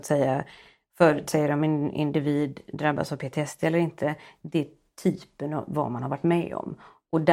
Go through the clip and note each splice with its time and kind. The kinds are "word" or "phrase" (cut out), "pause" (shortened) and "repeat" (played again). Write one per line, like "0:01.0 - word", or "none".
none